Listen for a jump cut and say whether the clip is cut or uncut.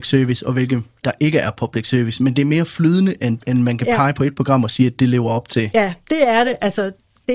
uncut